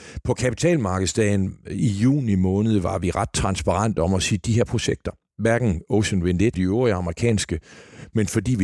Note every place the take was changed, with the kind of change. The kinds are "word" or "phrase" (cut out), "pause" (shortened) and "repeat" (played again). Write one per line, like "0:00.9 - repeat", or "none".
0:04.7 - phrase
0:06.5 - word